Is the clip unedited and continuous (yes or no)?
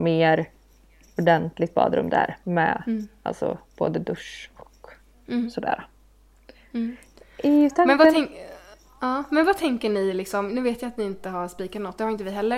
yes